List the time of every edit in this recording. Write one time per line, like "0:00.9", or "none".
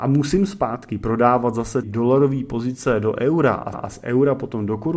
0:01.8
0:03.7

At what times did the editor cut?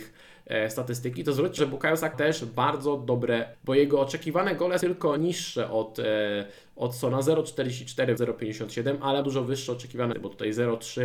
0:01.6
0:02.1
0:03.5
0:04.8
0:05.2
0:08.2
0:09.2
0:10.1

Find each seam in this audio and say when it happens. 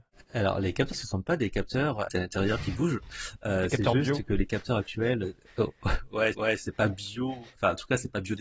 0:00.9
0:02.1
0:06.3

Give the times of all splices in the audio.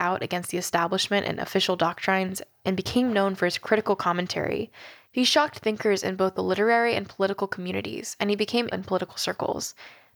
0:08.7

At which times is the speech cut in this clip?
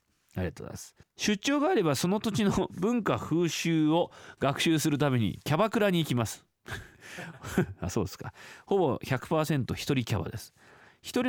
0:01.0
0:06.9

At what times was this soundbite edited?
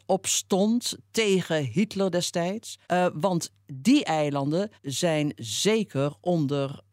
0:02.8
0:04.8

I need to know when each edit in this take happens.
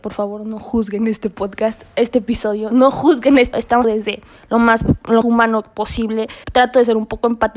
0:03.5
0:03.8
0:04.4
0:05.2
0:06.4

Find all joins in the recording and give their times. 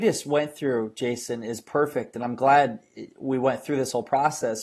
none

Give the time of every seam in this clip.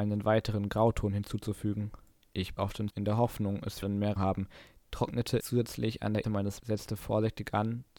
0:02.6
0:02.9
0:03.8
0:04.2
0:05.4
0:06.2
0:06.6

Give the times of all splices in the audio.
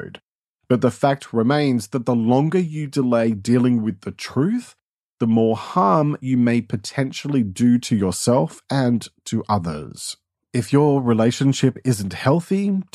none

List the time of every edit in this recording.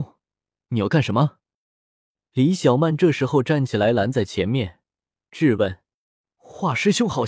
none

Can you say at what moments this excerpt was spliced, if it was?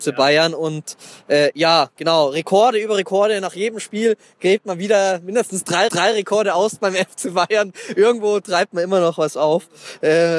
0:05.9

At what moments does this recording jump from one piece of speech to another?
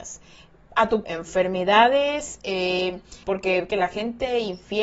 0:01.0
0:03.2
0:03.7

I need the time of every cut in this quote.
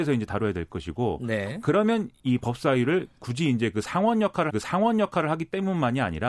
0:04.5

